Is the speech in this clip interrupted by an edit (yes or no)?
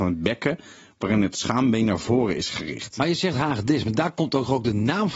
no